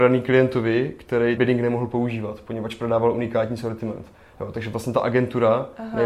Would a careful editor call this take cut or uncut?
cut